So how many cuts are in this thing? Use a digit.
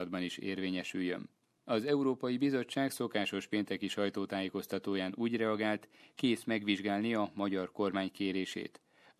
0